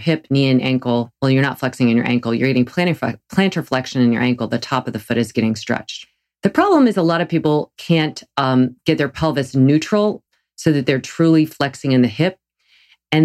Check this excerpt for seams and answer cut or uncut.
uncut